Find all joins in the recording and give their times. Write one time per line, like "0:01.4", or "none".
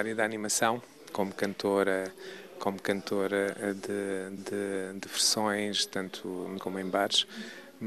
0:04.4
0:06.6